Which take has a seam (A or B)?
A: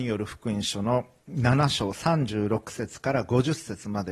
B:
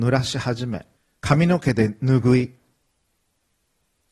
B